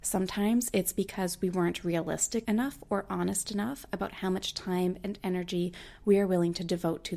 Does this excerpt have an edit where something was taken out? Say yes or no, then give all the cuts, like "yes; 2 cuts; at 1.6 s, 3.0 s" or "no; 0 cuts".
yes; 1 cut; at 2.4 s